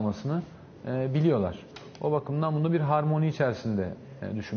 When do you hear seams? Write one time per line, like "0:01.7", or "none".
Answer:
none